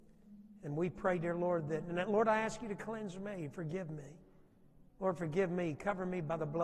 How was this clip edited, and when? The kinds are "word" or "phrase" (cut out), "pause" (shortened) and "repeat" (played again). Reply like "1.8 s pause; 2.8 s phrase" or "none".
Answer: 4.9 s pause